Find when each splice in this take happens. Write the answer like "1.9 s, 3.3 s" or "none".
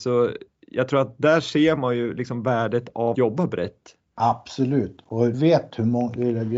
3.1 s, 5.3 s

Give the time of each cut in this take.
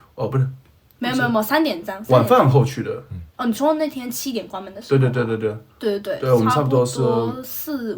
3.3 s

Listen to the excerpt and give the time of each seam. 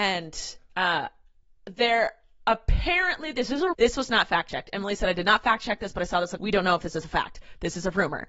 3.7 s, 6.4 s

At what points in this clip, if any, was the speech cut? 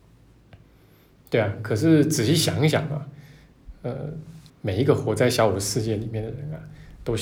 4.5 s

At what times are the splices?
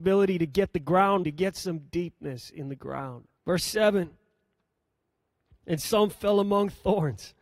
1.2 s, 3.4 s

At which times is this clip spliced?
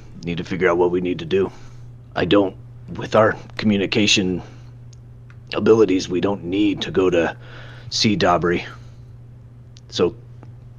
5.5 s

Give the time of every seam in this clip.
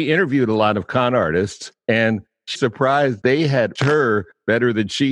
1.8 s, 2.6 s, 3.2 s, 3.8 s

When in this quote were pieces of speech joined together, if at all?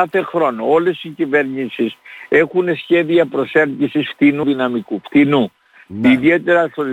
4.4 s

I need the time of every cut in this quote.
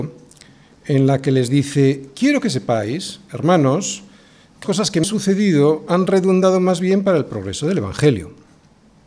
4.6 s, 5.0 s

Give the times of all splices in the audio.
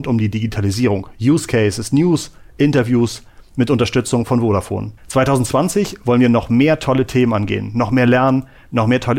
5.0 s

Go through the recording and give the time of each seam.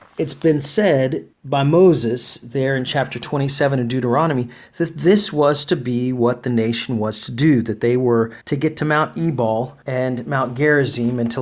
1.3 s, 8.4 s, 9.8 s

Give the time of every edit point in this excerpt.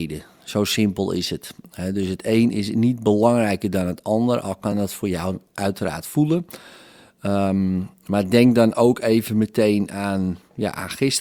none

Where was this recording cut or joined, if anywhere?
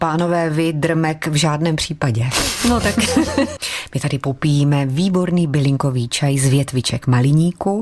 none

